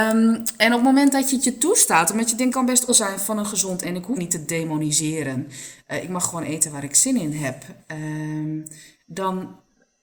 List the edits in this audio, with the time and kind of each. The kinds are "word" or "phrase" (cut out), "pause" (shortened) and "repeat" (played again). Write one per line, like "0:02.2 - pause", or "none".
0:02.5 - word
0:02.9 - word
0:03.8 - word
0:04.2 - word